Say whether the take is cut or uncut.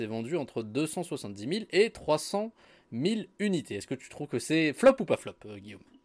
uncut